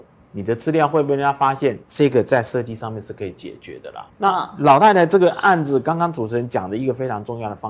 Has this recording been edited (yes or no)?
yes